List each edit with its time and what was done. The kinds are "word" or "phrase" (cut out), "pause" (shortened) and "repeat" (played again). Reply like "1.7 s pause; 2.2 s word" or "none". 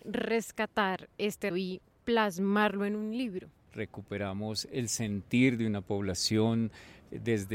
1.5 s word